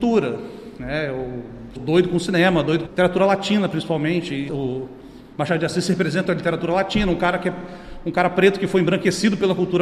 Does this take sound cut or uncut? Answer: cut